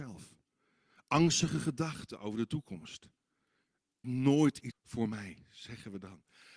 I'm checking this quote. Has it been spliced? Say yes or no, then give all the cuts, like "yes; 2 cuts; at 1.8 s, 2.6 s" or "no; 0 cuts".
yes; 2 cuts; at 4.0 s, 4.7 s